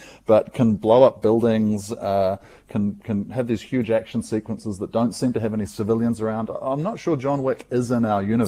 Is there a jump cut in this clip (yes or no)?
no